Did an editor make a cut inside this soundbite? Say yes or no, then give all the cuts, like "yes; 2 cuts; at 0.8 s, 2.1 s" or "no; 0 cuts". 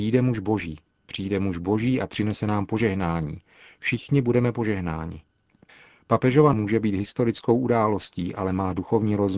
yes; 1 cut; at 6.5 s